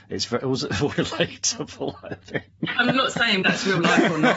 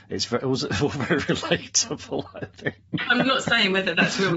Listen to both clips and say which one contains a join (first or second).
first